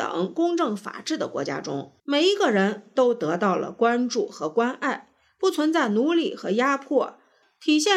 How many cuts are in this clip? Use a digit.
1